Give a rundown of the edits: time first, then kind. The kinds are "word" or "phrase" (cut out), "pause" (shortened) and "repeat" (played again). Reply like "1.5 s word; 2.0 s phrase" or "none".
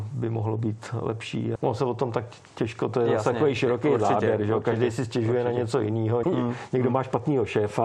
1.6 s word; 2.5 s pause; 6.2 s word